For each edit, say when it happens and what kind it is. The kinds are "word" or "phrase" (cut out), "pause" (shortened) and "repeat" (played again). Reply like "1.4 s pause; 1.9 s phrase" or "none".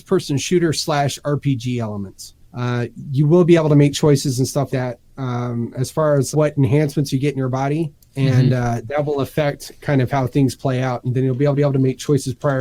2.4 s pause; 4.7 s word; 6.3 s word; 8.0 s pause; 11.5 s repeat